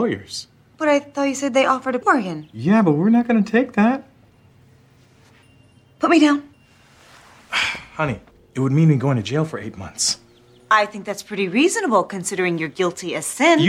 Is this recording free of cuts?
no; 2 cuts; at 2.0 s, 8.3 s

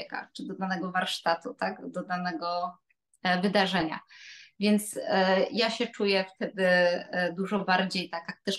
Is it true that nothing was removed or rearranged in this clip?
yes; 0 cuts

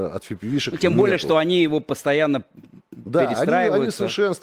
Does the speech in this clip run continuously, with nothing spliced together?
yes; 0 cuts

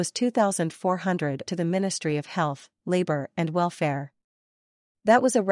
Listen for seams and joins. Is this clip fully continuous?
no; 1 cut; at 1.5 s

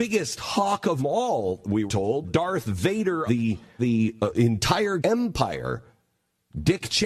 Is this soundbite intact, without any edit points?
no; 6 cuts; at 1.0 s, 1.9 s, 2.2 s, 3.3 s, 3.8 s, 5.0 s

